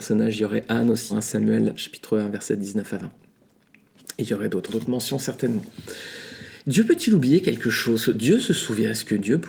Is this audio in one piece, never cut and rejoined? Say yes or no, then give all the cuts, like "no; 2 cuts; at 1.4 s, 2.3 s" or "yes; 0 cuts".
no; 2 cuts; at 1.1 s, 4.7 s